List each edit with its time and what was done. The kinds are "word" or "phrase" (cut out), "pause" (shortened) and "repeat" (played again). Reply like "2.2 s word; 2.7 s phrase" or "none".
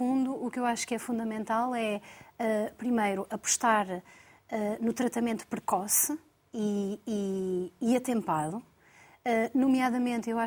none

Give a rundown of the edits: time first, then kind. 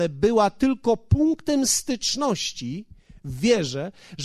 none

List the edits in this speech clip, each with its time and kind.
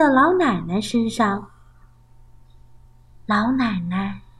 none

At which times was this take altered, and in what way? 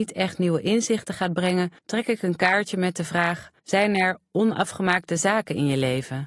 1.8 s pause; 3.6 s pause

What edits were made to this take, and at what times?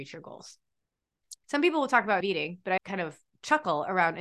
1.4 s word; 2.2 s word; 2.8 s word

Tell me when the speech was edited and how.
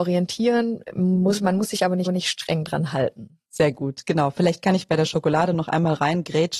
2.1 s repeat; 3.4 s pause

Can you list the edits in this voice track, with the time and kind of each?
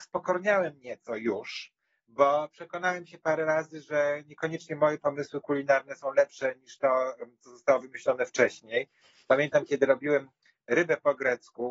none

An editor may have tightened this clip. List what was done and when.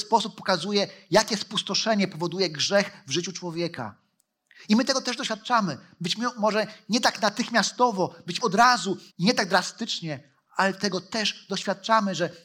8.4 s phrase; 9.1 s pause

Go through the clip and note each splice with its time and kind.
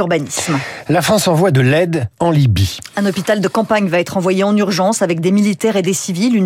2.1 s pause

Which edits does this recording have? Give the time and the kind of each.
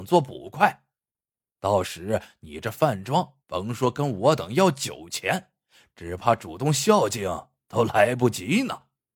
3.4 s pause

